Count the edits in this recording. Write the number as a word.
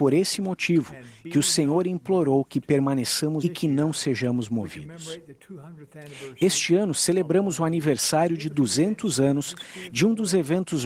one